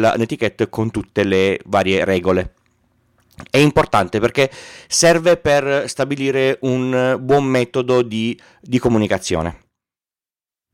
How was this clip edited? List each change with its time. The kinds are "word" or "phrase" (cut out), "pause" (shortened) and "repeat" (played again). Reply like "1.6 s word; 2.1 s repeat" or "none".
none